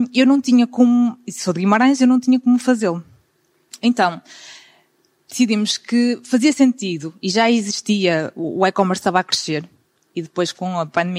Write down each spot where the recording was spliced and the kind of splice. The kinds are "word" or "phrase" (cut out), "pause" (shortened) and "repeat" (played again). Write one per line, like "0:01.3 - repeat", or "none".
none